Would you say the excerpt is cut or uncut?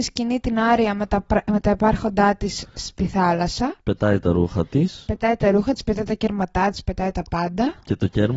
uncut